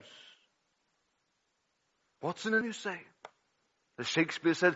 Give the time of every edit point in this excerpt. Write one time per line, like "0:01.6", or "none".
0:02.6